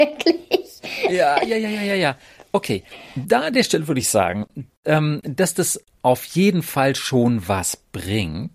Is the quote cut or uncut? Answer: uncut